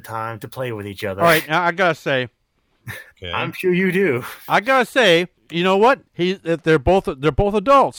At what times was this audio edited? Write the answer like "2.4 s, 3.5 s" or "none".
3.1 s, 5.4 s, 6.1 s